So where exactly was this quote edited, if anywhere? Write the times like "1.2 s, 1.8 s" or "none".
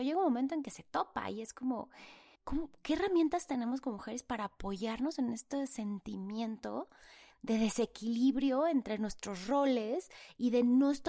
2.3 s